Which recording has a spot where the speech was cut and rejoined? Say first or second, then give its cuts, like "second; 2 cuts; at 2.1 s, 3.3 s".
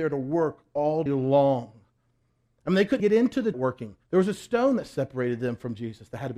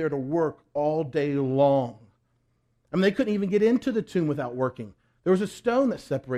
first; 4 cuts; at 1.1 s, 3.0 s, 3.5 s, 4.0 s